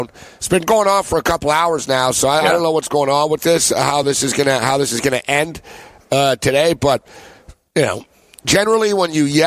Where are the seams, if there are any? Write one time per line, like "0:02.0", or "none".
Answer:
none